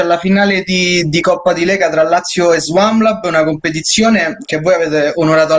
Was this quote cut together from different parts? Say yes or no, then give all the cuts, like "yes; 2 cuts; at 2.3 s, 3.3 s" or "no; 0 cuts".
no; 0 cuts